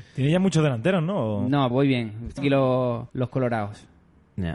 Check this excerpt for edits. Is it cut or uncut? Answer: cut